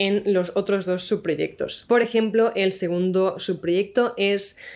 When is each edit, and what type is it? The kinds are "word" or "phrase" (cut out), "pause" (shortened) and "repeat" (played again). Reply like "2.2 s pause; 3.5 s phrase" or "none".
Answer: none

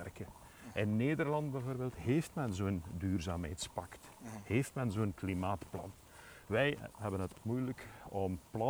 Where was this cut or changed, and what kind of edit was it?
7.4 s word

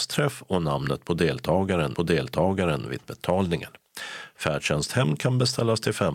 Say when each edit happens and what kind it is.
1.9 s repeat

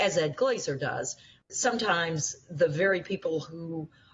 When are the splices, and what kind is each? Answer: none

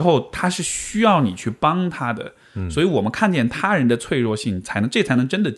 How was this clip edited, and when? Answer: none

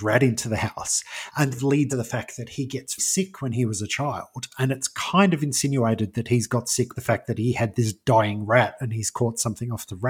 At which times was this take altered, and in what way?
1.5 s phrase; 1.9 s word; 3.0 s word; 6.9 s phrase

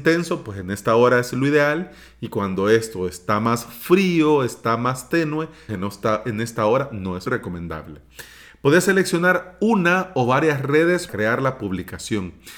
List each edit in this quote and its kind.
5.7 s word; 7.3 s word; 11.1 s word

